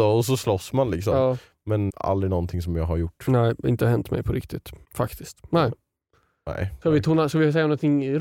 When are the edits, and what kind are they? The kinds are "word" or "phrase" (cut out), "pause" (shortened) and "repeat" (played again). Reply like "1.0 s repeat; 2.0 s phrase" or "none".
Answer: 1.9 s word; 4.8 s pause